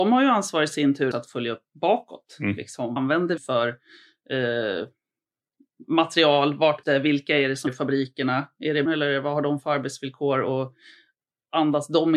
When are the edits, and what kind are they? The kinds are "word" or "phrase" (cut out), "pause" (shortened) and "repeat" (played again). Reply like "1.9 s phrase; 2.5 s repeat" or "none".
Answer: 1.1 s word; 3.0 s word; 3.4 s word; 6.8 s word; 7.7 s word; 8.8 s word